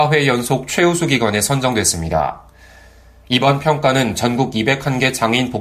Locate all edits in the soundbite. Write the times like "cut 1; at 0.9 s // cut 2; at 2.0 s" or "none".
none